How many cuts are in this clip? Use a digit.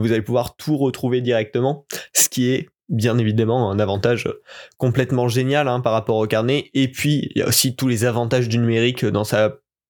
0